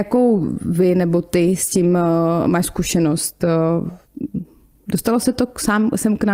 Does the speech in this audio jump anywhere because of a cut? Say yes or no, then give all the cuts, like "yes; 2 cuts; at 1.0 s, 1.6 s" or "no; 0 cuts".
no; 0 cuts